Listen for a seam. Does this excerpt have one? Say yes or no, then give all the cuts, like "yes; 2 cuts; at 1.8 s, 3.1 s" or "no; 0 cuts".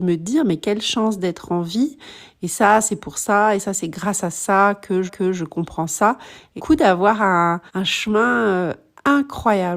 yes; 3 cuts; at 5.1 s, 6.6 s, 7.7 s